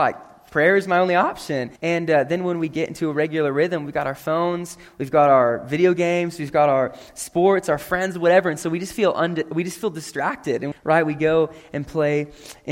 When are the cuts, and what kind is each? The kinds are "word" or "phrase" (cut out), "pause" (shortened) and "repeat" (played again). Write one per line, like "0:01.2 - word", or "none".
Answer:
0:01.8 - pause
0:10.7 - word